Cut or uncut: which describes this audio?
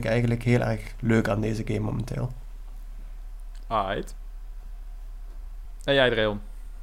uncut